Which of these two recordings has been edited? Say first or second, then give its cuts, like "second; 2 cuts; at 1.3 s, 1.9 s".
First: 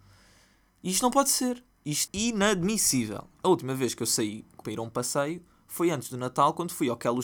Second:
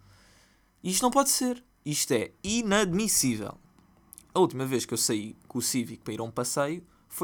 first; 3 cuts; at 2.1 s, 3.3 s, 4.6 s